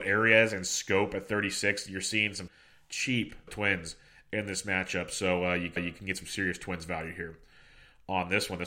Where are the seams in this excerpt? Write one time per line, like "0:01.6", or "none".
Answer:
0:02.5
0:03.5
0:05.8